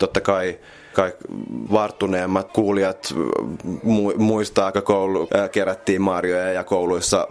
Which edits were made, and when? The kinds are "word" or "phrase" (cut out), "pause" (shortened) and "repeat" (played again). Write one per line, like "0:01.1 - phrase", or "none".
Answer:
0:00.9 - word
0:01.7 - word
0:02.5 - word
0:04.7 - word
0:05.3 - word